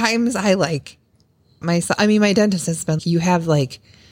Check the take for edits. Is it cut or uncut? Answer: cut